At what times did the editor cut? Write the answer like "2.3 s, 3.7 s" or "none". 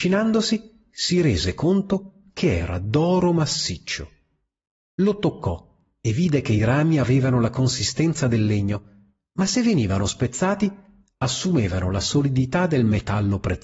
none